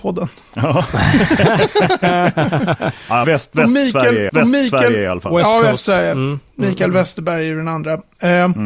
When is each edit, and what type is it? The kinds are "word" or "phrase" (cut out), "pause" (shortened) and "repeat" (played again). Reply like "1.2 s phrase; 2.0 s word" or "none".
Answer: 3.2 s word; 4.3 s repeat